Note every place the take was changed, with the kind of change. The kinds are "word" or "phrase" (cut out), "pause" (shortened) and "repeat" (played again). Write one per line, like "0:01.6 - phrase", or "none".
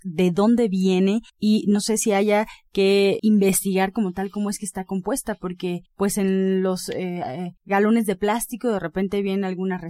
0:01.3 - pause
0:03.2 - word
0:05.9 - pause
0:07.6 - pause